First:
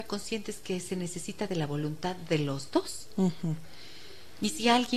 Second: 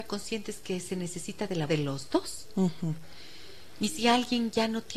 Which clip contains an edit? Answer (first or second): second